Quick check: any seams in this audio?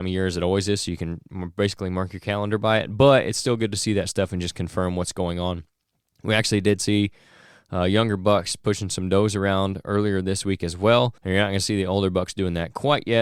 yes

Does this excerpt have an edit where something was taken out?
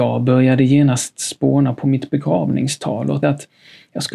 yes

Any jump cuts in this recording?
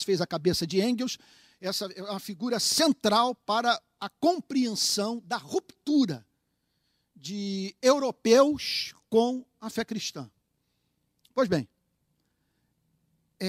no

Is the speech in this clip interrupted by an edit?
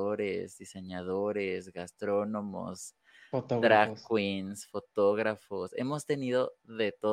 no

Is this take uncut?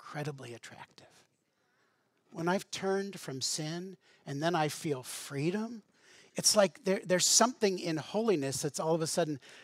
yes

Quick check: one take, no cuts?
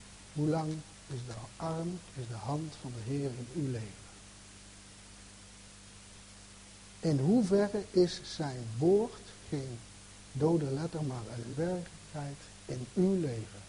no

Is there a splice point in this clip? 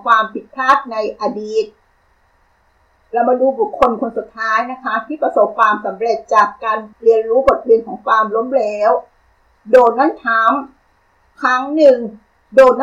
yes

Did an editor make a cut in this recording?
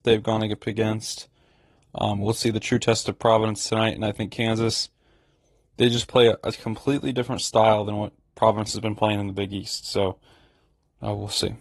no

